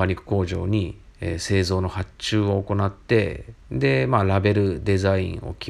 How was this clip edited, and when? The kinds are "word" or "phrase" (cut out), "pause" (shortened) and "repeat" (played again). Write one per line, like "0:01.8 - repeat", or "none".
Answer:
0:03.6 - pause